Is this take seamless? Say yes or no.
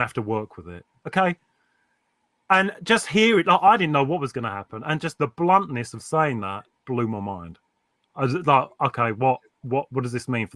yes